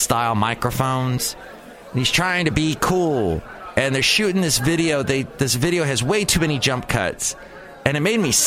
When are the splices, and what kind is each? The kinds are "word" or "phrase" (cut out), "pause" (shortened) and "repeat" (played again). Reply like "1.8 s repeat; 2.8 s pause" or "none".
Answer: none